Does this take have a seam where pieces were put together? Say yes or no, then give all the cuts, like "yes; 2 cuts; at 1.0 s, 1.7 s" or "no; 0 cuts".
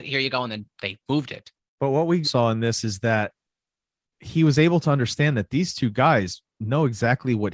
yes; 1 cut; at 2.2 s